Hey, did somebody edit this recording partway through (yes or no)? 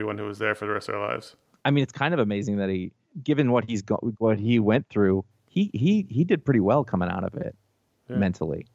no